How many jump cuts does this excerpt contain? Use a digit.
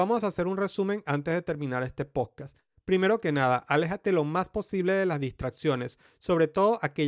0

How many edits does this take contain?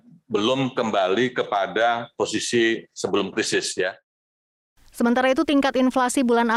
0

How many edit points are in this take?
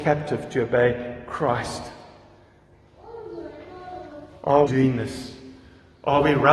1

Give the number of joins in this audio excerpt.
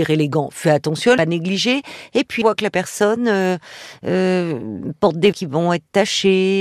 3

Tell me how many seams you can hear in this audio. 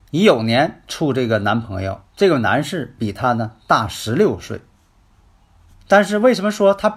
1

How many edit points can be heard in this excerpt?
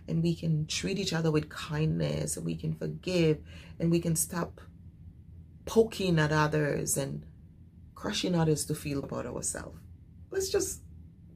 1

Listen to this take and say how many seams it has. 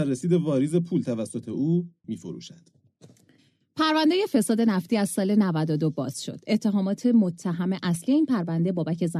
1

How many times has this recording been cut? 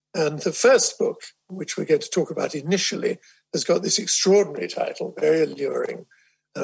0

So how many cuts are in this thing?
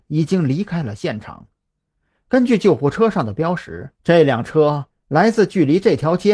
1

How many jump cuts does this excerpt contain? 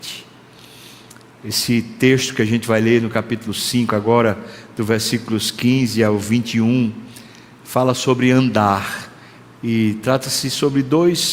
0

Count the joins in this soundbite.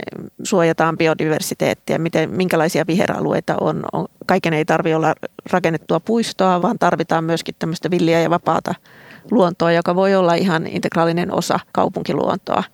2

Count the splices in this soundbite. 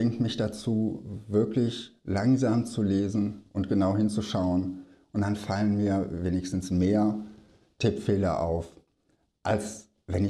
0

